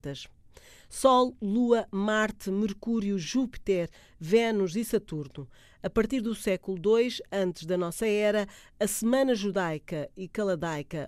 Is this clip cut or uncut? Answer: uncut